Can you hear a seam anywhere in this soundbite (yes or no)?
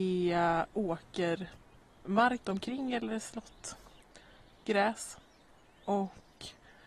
yes